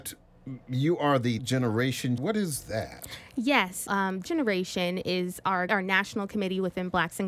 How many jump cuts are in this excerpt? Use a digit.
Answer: 5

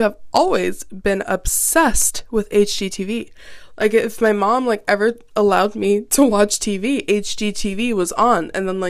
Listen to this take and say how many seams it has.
0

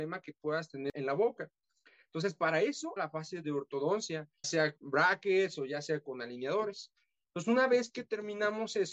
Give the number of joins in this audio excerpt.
3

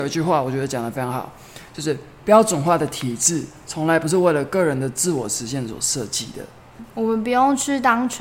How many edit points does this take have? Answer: 1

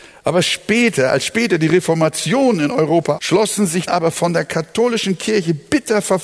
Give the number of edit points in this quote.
2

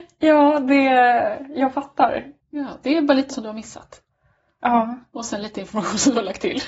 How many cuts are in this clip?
1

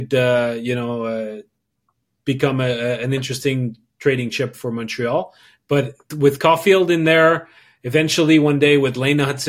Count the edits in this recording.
1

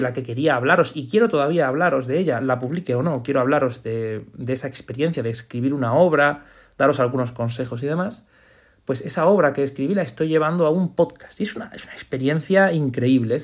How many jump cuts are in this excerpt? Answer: 0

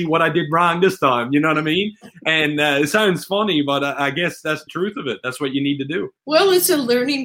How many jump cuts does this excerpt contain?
2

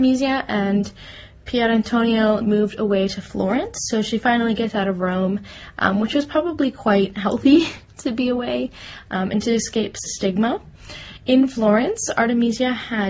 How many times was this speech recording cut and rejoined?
2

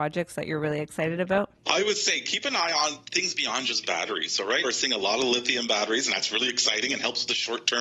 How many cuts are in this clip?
2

